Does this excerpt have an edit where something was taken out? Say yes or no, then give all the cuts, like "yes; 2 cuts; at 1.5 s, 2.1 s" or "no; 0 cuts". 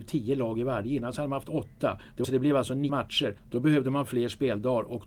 yes; 3 cuts; at 2.2 s, 2.9 s, 3.4 s